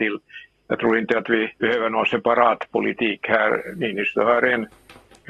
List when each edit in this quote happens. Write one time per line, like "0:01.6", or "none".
0:01.6